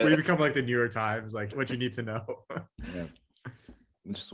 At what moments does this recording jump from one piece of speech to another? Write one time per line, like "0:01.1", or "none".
0:01.5